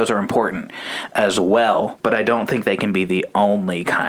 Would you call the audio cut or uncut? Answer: uncut